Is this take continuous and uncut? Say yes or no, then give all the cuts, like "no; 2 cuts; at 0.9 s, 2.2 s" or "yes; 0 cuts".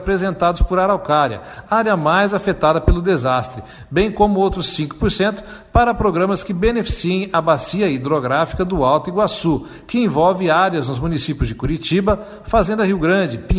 yes; 0 cuts